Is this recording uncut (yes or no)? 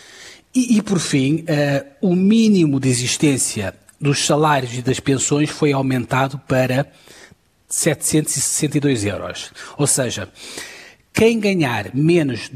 yes